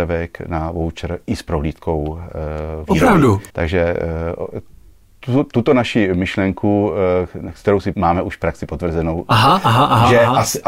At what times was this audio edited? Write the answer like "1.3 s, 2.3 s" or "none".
3.5 s, 7.9 s